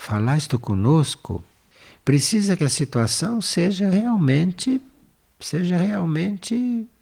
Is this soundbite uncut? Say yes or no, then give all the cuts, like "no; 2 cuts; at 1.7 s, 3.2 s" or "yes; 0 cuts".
yes; 0 cuts